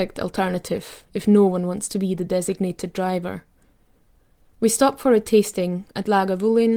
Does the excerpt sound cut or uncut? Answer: uncut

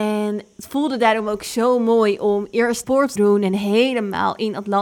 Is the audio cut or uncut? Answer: cut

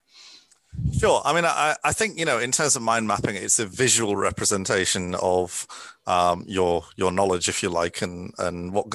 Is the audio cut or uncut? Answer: uncut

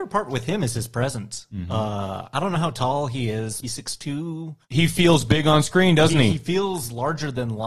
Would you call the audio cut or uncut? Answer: cut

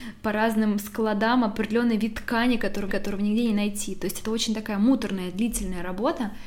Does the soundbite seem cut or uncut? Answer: cut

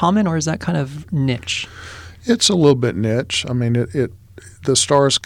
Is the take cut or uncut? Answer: uncut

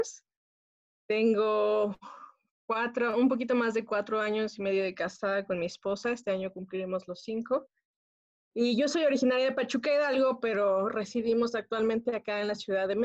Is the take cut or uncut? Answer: uncut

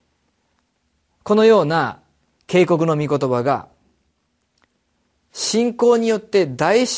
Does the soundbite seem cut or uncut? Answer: uncut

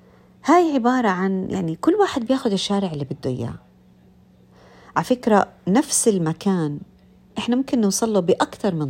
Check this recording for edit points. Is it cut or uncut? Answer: uncut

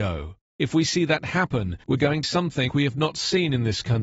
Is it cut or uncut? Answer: cut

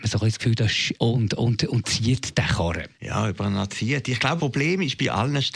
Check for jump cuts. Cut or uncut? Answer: cut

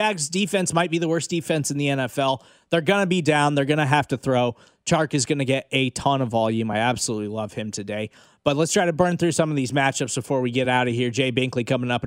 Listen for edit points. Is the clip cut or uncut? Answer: uncut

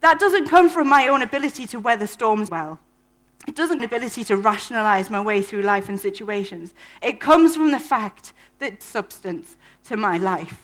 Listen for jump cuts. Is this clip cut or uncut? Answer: cut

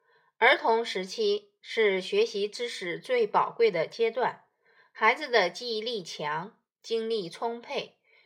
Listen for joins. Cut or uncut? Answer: uncut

